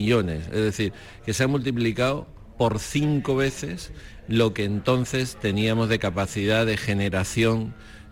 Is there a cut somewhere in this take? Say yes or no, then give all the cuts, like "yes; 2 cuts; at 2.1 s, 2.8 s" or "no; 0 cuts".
no; 0 cuts